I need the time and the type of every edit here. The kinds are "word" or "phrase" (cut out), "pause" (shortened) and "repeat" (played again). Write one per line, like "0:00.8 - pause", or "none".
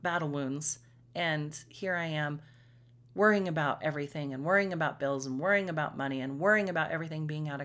none